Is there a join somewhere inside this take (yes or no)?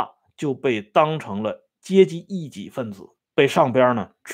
yes